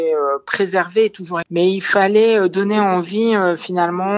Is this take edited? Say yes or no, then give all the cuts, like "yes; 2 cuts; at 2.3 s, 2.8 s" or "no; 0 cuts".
yes; 1 cut; at 1.4 s